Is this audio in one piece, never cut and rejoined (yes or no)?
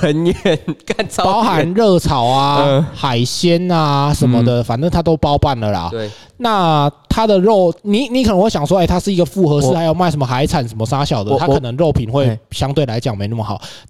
no